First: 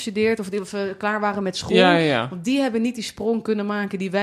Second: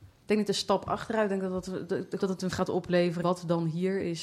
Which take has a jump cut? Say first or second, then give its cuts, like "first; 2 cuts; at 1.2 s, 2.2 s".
second; 3 cuts; at 2.2 s, 2.5 s, 3.2 s